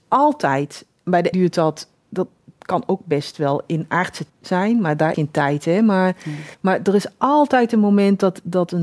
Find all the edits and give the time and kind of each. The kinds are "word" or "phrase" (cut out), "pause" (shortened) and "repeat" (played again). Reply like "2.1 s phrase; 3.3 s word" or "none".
1.3 s word; 4.3 s phrase; 5.1 s word; 6.5 s pause